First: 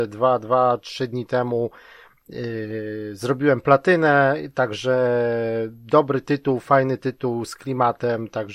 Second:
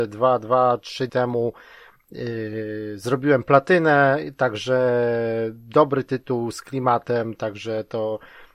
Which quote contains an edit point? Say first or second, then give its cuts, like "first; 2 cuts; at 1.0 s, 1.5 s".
second; 2 cuts; at 1.1 s, 6.1 s